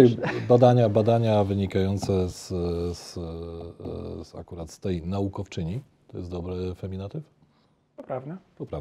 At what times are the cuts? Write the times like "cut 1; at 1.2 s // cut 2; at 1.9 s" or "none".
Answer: none